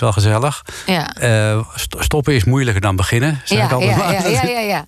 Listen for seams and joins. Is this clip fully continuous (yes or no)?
yes